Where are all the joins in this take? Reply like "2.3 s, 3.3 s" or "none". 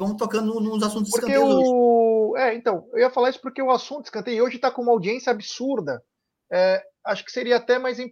none